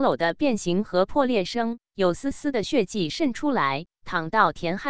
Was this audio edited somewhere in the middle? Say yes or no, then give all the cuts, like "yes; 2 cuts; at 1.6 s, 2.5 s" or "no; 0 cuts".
no; 0 cuts